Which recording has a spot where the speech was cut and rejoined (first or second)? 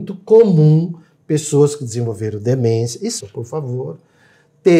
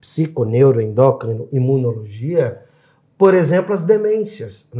first